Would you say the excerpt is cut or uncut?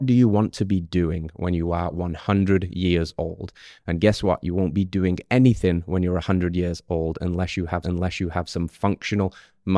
cut